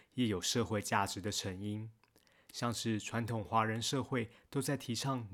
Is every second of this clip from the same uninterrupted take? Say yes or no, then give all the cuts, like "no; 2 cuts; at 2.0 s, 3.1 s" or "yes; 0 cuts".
yes; 0 cuts